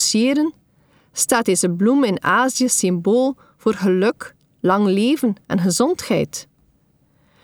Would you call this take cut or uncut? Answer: uncut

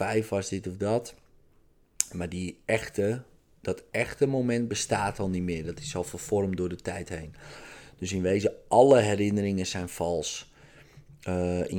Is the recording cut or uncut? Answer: uncut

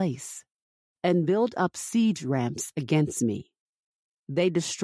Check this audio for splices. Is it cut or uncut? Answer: uncut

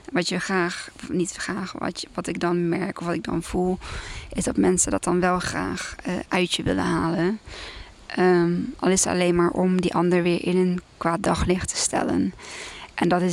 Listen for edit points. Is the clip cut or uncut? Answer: uncut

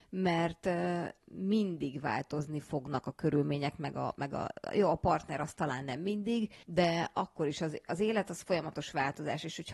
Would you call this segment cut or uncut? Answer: cut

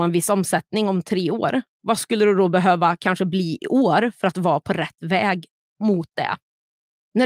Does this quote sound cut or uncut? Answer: uncut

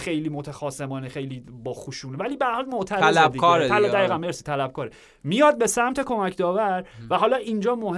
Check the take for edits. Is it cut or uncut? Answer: uncut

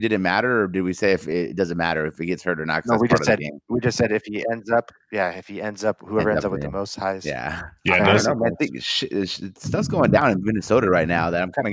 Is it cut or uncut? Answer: cut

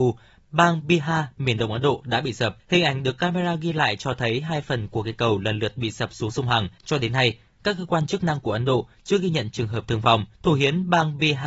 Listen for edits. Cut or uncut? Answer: cut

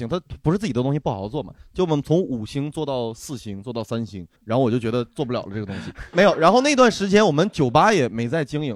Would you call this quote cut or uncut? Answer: cut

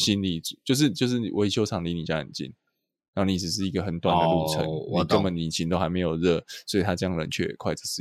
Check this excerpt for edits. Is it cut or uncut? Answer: uncut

